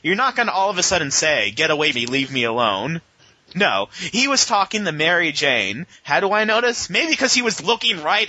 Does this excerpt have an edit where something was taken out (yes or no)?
yes